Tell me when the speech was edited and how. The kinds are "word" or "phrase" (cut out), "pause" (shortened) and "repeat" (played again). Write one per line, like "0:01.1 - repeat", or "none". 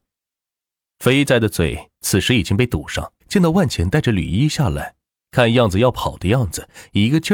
0:03.2 - pause